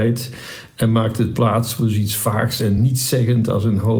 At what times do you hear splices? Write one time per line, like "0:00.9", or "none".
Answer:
none